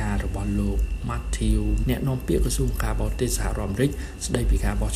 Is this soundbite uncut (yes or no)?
no